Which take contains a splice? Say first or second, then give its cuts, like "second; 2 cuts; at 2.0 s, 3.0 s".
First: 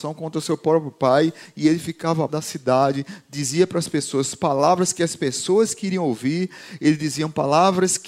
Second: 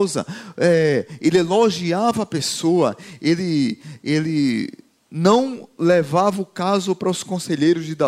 first; 1 cut; at 2.3 s